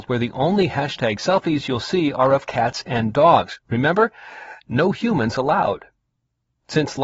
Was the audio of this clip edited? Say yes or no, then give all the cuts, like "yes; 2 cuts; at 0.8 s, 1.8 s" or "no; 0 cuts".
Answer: no; 0 cuts